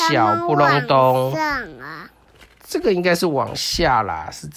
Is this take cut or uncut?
uncut